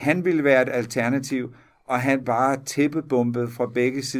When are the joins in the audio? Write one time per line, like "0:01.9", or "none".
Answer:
0:02.2